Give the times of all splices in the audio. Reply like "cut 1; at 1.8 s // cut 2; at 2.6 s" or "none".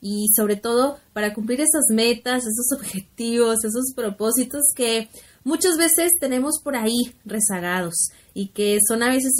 none